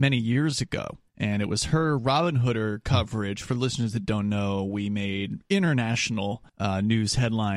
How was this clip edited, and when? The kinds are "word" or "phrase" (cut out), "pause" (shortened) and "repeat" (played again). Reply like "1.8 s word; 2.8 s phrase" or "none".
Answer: 1.1 s pause; 6.5 s pause